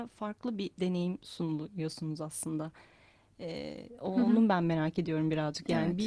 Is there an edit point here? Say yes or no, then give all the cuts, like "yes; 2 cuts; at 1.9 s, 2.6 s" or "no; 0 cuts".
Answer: no; 0 cuts